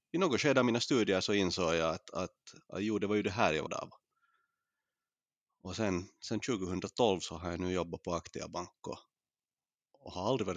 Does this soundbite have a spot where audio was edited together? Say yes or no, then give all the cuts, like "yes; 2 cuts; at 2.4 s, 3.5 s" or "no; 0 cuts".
yes; 1 cut; at 3.7 s